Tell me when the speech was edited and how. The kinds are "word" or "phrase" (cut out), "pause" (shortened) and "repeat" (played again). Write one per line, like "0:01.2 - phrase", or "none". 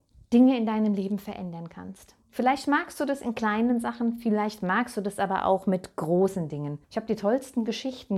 0:02.2 - pause
0:06.8 - pause